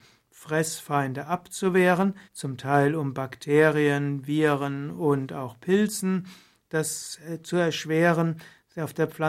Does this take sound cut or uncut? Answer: cut